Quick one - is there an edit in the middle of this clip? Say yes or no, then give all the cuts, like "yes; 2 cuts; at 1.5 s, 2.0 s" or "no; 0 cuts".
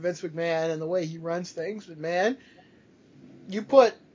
no; 0 cuts